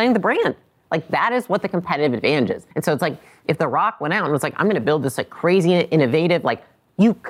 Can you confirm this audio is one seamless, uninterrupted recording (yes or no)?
no